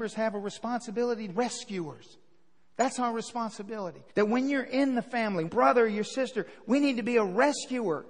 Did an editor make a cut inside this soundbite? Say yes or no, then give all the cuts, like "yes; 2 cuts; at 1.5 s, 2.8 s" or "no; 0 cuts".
yes; 3 cuts; at 1.3 s, 4.1 s, 5.5 s